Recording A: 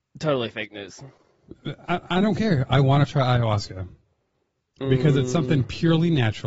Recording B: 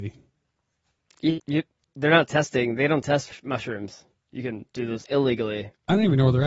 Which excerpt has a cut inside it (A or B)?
B